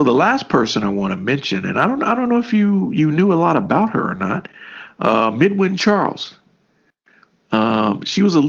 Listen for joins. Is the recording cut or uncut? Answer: uncut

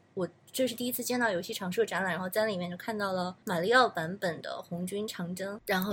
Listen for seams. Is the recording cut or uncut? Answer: cut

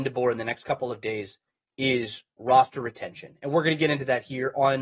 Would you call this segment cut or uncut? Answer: uncut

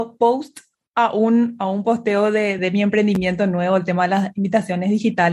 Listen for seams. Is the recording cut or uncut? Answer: cut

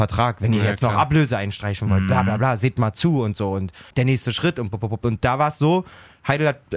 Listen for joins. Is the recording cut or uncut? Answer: cut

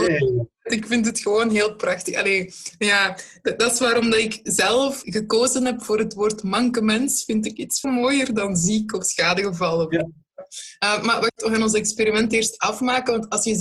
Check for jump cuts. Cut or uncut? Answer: cut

